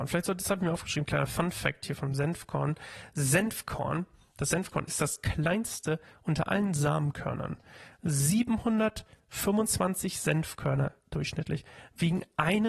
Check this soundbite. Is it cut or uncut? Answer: uncut